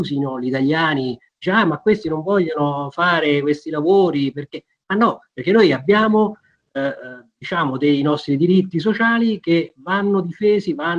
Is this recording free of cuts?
yes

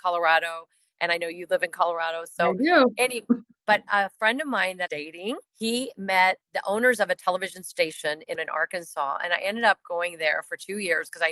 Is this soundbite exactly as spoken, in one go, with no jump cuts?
no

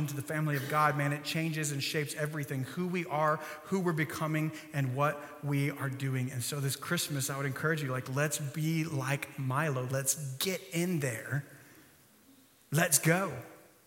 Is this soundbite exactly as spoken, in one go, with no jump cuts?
yes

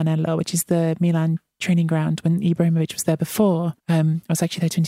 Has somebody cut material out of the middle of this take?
yes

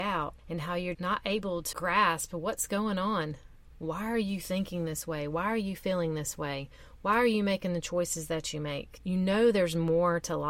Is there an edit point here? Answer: yes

